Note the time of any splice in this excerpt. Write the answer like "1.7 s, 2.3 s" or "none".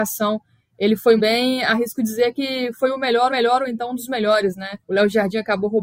1.2 s, 3.3 s, 4.8 s